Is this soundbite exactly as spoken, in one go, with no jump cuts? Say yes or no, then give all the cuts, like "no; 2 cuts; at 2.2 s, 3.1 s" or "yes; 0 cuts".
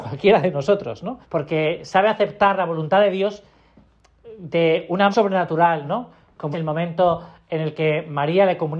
no; 3 cuts; at 1.2 s, 5.1 s, 6.5 s